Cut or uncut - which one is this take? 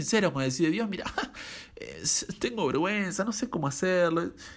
uncut